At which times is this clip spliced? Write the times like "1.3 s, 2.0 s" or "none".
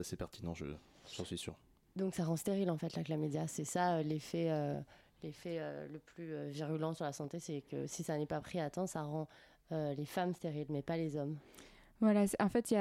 8.9 s